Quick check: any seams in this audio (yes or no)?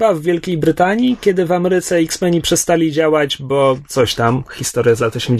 no